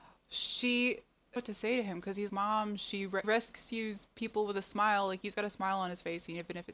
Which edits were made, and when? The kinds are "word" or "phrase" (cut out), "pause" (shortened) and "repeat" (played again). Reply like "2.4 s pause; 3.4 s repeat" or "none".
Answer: 1.4 s phrase; 2.3 s word; 3.2 s word; 5.3 s word